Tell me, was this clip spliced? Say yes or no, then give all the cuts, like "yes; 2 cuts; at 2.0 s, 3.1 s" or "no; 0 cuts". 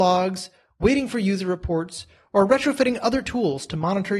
no; 0 cuts